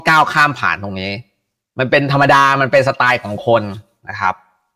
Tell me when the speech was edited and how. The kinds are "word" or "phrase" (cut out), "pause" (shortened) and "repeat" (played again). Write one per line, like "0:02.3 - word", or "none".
none